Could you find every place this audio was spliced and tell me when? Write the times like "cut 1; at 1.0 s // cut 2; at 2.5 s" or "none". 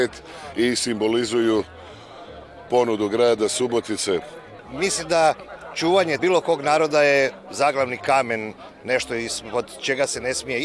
cut 1; at 2.7 s // cut 2; at 6.2 s